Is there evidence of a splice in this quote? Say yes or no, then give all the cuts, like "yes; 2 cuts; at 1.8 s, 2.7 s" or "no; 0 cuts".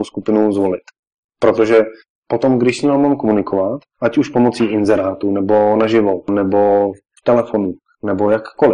no; 0 cuts